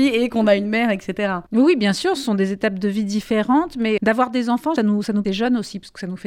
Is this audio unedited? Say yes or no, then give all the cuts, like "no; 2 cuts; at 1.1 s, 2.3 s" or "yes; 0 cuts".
no; 4 cuts; at 1.5 s, 4.0 s, 4.8 s, 5.2 s